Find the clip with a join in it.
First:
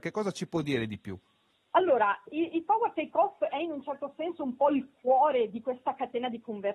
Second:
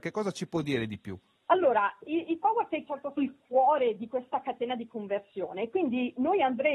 second; 3 cuts; at 1.4 s, 2.9 s, 3.2 s

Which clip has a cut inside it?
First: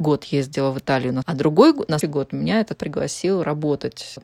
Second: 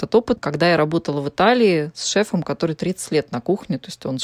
first; 3 cuts; at 1.2 s, 2.0 s, 2.7 s

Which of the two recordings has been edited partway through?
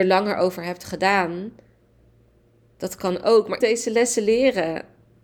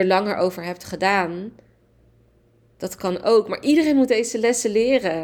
first; 1 cut; at 3.6 s

